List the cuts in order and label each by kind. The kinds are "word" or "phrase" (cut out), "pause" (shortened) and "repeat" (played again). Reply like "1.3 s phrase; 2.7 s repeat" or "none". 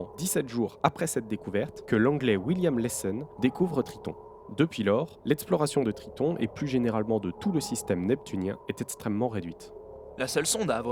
none